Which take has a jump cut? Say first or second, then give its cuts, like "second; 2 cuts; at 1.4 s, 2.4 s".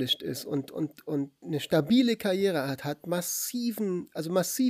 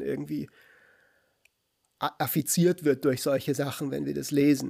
first; 1 cut; at 1.4 s